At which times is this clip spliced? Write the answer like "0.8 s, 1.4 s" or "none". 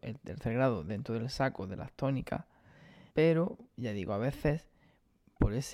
3.1 s